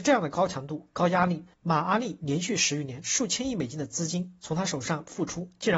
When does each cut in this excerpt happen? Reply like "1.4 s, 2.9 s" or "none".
1.5 s